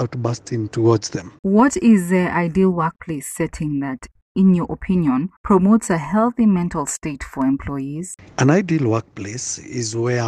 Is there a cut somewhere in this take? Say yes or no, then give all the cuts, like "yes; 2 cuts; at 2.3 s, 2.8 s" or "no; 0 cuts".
yes; 2 cuts; at 1.4 s, 5.4 s